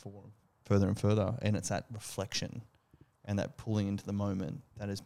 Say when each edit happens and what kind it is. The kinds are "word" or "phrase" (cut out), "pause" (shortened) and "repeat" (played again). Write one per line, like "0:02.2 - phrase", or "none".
none